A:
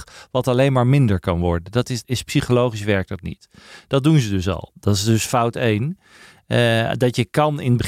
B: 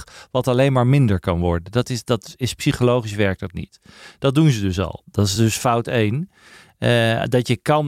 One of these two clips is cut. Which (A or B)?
A